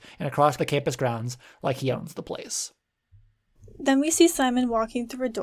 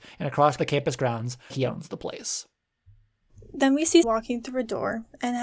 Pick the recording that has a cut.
second; 2 cuts; at 1.5 s, 4.0 s

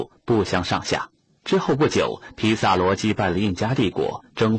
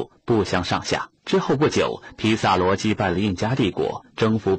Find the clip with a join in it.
second; 1 cut; at 1.2 s

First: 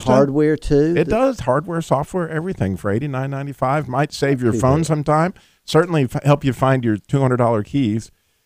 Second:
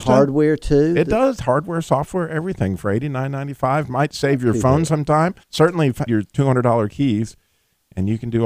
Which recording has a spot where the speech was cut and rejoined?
second; 2 cuts; at 5.4 s, 6.1 s

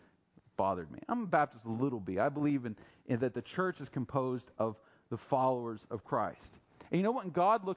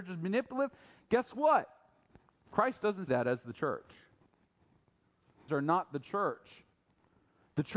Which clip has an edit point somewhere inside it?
second; 2 cuts; at 3.1 s, 5.5 s

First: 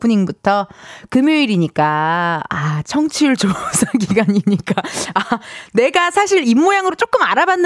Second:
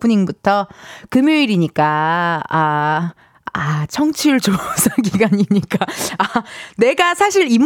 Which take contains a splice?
first; 1 cut; at 2.5 s

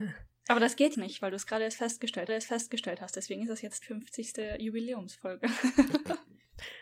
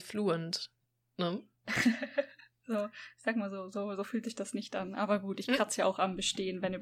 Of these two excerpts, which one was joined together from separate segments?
first; 3 cuts; at 0.9 s, 2.3 s, 3.8 s

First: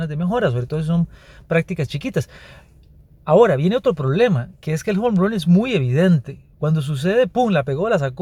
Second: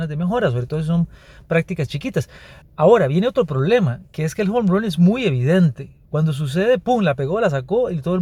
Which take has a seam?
second; 1 cut; at 2.6 s

